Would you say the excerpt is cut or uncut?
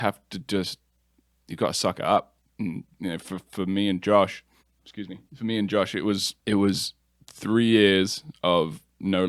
cut